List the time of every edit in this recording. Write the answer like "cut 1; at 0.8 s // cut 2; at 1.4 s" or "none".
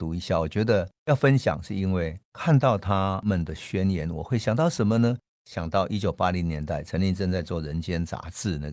cut 1; at 2.2 s